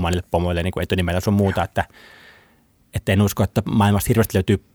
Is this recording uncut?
yes; 0 cuts

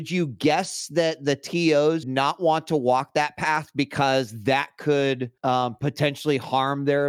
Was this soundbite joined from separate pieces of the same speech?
yes; 2 cuts; at 2.0 s, 5.4 s

